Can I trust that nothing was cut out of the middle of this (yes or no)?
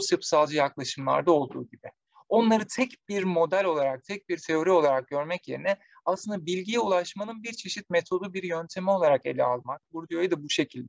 yes